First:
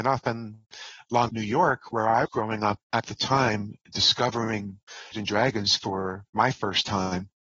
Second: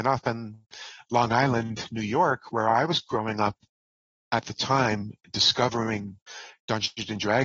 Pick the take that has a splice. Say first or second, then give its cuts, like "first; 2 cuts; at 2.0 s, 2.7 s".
first; 4 cuts; at 1.3 s, 2.3 s, 2.8 s, 5.1 s